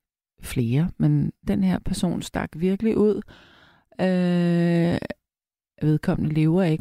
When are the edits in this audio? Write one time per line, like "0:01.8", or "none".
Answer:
none